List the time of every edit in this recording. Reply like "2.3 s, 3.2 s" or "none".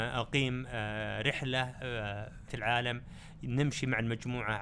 2.5 s